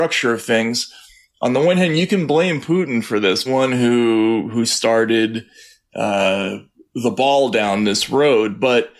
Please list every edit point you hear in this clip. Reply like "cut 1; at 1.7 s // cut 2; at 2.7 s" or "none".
cut 1; at 3.5 s